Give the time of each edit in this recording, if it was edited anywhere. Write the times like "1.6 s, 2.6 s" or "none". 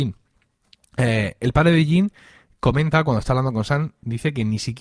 none